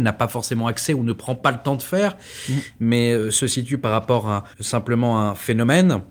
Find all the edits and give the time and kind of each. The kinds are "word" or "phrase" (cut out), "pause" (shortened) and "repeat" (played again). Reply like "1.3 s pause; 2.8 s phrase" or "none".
4.5 s pause